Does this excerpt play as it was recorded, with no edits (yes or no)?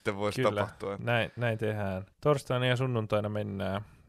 no